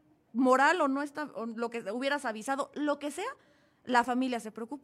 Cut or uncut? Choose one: uncut